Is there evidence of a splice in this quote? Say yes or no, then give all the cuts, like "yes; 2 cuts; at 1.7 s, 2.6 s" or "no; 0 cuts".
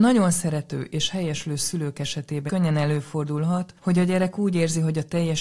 yes; 1 cut; at 2.5 s